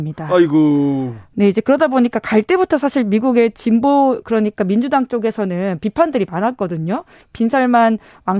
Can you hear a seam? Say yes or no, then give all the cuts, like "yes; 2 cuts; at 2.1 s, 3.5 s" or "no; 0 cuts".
no; 0 cuts